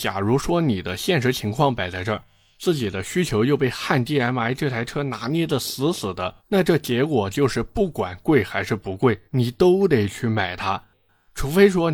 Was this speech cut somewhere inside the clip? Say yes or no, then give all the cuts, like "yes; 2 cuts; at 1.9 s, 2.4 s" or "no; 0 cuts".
yes; 2 cuts; at 6.4 s, 9.2 s